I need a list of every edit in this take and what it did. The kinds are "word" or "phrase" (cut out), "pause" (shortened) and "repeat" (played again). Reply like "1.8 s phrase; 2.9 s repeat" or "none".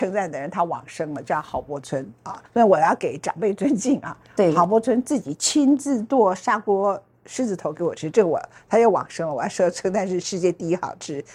2.5 s pause